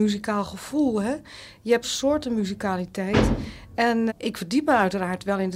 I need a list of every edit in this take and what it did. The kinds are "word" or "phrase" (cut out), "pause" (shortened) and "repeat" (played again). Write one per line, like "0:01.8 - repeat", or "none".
0:01.8 - word
0:04.1 - word